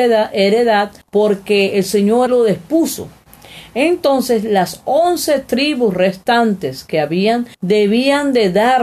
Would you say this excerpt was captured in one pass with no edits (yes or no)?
no